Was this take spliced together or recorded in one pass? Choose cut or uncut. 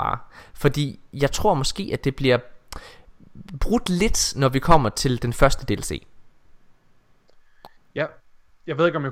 uncut